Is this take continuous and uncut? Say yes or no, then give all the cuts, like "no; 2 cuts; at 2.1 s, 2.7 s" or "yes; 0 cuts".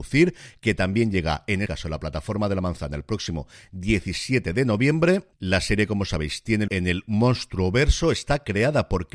no; 2 cuts; at 1.7 s, 6.7 s